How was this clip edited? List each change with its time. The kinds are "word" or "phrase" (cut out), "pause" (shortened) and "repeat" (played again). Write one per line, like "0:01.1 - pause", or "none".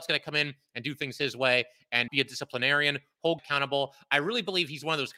0:02.1 - word
0:03.4 - word